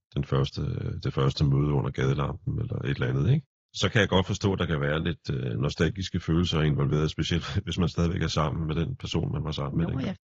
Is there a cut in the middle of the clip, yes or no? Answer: no